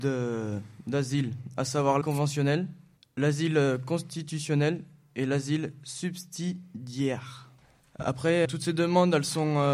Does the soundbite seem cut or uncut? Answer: cut